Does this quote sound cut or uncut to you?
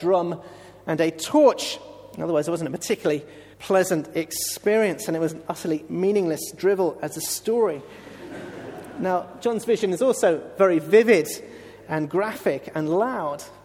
cut